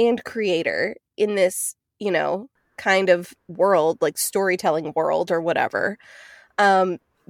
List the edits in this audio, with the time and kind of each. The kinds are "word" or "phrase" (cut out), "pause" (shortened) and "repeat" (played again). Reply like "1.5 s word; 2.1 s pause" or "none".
none